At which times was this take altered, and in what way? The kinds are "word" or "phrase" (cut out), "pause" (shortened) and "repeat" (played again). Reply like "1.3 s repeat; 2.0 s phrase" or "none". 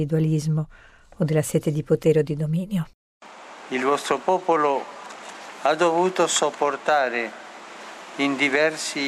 none